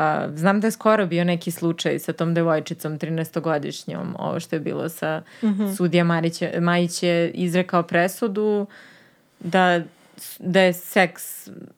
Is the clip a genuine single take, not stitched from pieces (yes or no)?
yes